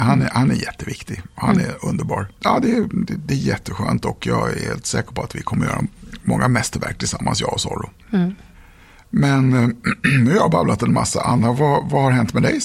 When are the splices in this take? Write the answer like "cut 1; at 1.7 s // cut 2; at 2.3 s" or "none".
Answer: none